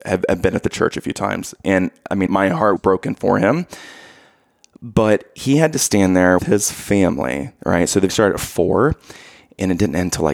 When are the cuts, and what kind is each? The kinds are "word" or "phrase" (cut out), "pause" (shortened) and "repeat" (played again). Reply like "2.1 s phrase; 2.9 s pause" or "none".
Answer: 2.3 s word; 2.8 s word; 6.4 s word; 8.1 s word